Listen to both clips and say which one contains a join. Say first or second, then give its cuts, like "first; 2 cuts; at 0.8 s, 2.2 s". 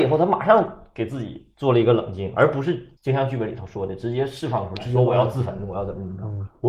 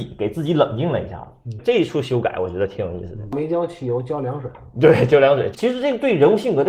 first; 1 cut; at 3.0 s